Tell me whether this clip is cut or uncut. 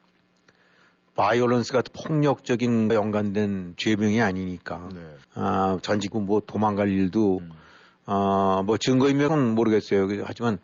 cut